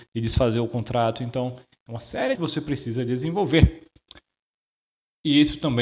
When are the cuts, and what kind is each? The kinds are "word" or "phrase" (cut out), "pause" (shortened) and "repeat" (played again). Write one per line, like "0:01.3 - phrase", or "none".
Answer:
0:02.3 - phrase